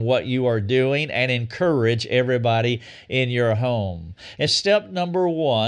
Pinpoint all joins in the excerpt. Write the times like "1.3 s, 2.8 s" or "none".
4.5 s